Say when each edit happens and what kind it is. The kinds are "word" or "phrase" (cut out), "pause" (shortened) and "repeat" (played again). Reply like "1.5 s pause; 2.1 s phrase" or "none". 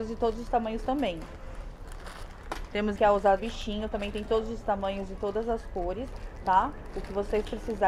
2.9 s phrase; 3.4 s phrase